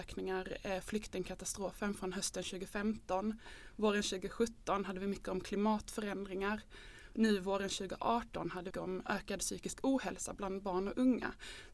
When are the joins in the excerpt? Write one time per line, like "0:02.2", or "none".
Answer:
0:08.7

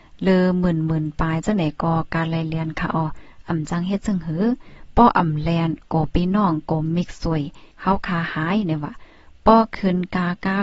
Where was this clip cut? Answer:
0:07.7

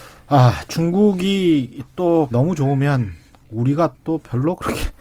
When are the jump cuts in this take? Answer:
0:02.3

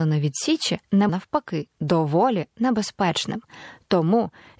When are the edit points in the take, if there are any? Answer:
0:01.1

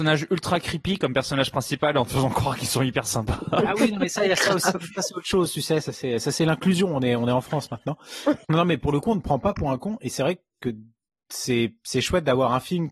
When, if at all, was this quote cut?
none

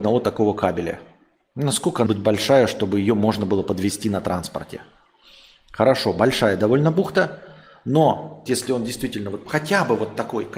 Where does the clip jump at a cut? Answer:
0:02.1
0:08.5
0:09.4

